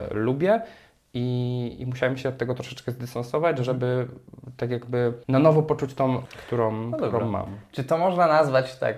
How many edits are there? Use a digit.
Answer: 2